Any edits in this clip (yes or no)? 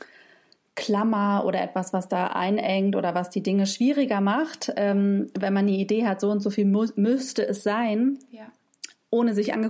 no